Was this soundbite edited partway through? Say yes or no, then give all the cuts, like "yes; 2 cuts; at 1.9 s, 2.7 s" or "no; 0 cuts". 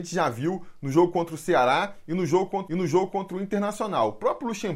yes; 1 cut; at 2.7 s